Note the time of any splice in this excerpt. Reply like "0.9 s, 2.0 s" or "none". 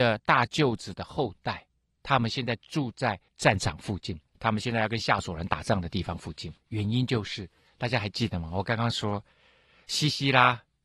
3.3 s, 4.3 s, 6.6 s